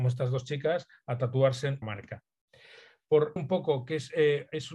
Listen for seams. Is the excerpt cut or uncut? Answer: cut